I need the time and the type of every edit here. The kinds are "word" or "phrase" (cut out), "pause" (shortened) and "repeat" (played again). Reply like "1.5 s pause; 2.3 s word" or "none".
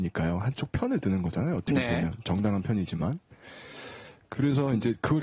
none